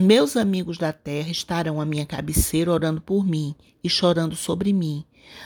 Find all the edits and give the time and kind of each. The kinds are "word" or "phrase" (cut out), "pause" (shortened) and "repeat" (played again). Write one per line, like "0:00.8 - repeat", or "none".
none